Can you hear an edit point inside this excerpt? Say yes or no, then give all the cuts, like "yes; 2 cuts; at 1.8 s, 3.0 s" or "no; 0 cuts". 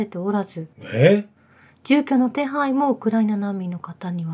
no; 0 cuts